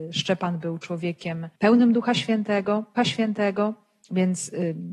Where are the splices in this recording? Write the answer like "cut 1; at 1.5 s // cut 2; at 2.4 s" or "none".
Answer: cut 1; at 1.6 s // cut 2; at 3.0 s